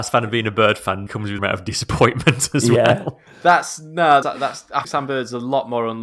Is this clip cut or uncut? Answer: cut